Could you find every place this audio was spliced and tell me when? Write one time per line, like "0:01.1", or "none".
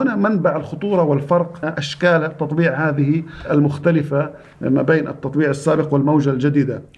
0:01.6